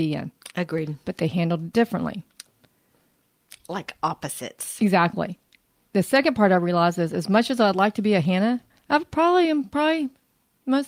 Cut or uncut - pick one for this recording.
uncut